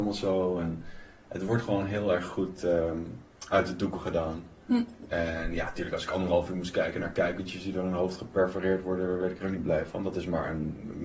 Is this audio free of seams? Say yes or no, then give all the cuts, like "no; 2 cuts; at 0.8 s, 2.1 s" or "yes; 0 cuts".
yes; 0 cuts